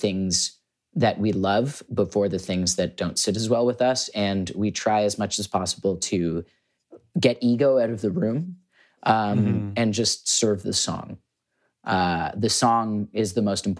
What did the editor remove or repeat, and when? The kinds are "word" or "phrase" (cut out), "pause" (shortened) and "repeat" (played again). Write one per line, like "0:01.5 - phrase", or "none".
none